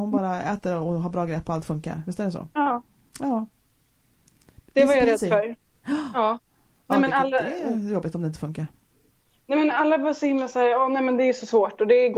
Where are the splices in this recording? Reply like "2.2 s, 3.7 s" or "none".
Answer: none